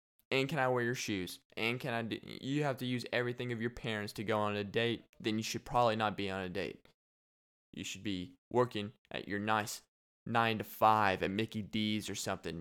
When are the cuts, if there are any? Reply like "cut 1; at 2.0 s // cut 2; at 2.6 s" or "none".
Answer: cut 1; at 8.4 s